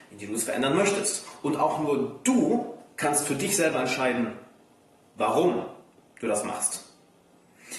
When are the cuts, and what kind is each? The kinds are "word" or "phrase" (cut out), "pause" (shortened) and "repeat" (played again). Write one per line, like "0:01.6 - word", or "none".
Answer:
none